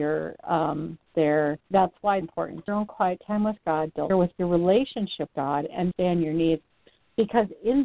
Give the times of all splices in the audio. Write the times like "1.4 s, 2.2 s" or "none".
1.1 s, 1.7 s, 2.2 s, 2.7 s, 4.1 s, 5.3 s, 5.9 s